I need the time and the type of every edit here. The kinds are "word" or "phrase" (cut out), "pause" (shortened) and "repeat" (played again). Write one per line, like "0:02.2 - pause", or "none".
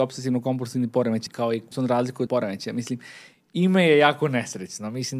0:01.3 - word
0:01.7 - word
0:02.3 - word